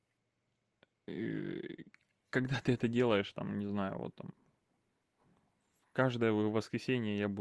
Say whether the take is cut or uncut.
uncut